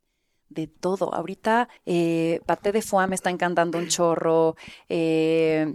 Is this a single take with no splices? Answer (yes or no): no